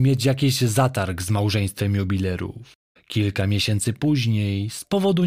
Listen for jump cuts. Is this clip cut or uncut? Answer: uncut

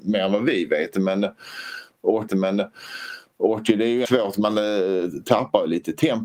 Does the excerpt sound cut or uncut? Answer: cut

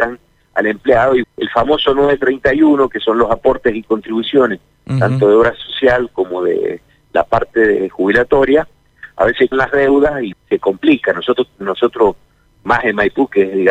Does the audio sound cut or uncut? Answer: cut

